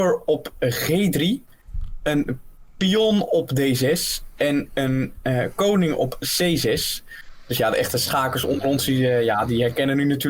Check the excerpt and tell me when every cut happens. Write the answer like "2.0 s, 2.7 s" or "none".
none

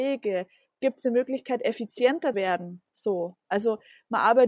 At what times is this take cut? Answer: 2.3 s

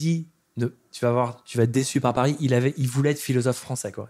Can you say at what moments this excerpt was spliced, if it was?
none

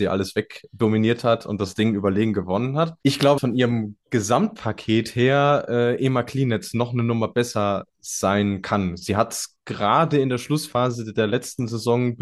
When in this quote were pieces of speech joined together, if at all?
3.0 s, 3.4 s

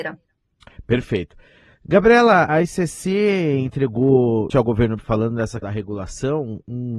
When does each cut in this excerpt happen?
2.5 s, 4.5 s, 5.0 s, 5.6 s

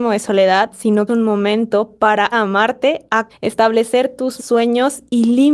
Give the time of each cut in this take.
1.1 s, 2.3 s, 3.3 s, 4.4 s

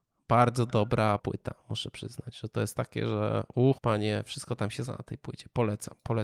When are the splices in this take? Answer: 1.2 s, 3.8 s, 4.9 s

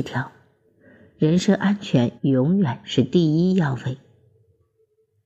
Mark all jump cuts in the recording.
2.2 s

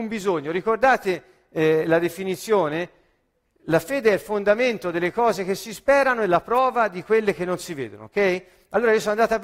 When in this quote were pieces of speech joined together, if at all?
none

